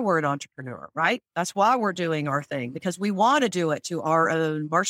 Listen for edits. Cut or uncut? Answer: uncut